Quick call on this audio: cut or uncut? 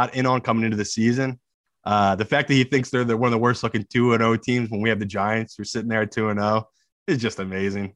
uncut